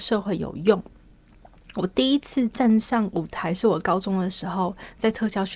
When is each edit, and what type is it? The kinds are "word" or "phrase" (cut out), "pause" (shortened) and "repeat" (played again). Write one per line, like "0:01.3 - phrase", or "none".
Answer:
none

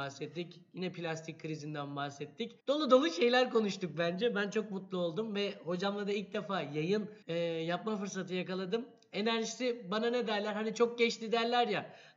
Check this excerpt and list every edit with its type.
0:02.6 - pause
0:07.2 - pause

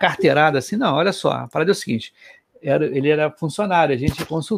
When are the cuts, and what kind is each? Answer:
none

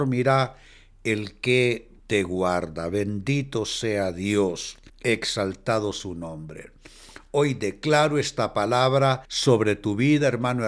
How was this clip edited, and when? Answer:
0:02.0 - pause
0:04.9 - pause
0:09.2 - pause

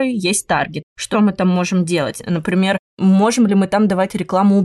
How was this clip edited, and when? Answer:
0:01.1 - word

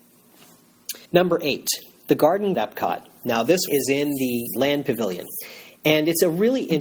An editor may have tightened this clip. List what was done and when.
0:01.1 - pause
0:02.5 - word
0:03.7 - word
0:04.6 - word

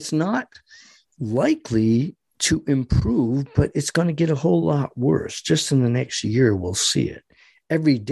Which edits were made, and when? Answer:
none

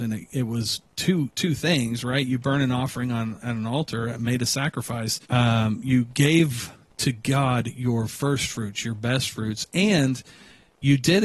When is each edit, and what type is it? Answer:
0:05.2 - pause

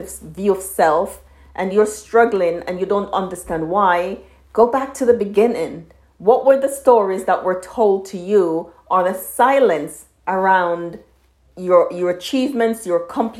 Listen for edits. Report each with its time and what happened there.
none

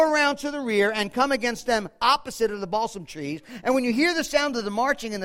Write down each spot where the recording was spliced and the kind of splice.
none

